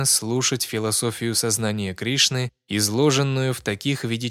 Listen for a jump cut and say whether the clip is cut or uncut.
uncut